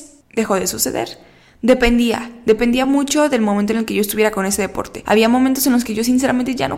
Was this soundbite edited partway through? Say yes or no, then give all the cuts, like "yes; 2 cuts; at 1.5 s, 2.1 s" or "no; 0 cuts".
no; 0 cuts